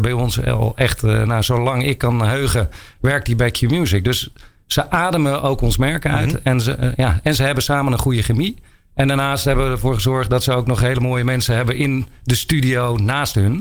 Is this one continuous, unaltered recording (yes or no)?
yes